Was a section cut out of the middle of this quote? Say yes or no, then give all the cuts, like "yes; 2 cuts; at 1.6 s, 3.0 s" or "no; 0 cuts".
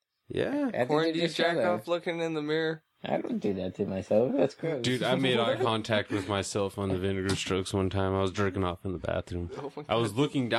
yes; 1 cut; at 2.9 s